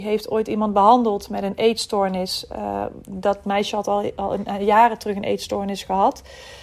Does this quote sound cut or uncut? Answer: uncut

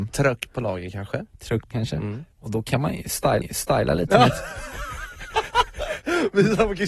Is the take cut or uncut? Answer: cut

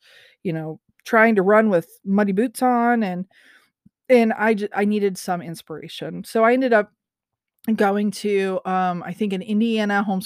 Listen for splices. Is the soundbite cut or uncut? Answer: uncut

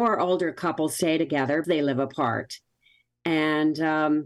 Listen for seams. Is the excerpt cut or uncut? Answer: cut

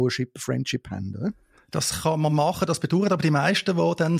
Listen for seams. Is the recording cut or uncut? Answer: uncut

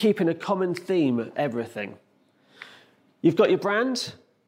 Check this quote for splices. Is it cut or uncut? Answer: cut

